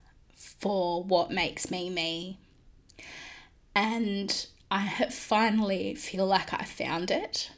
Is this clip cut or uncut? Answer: uncut